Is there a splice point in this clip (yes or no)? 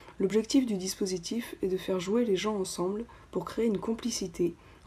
no